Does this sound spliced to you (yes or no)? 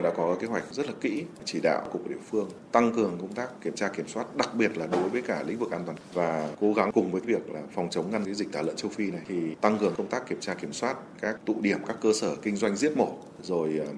no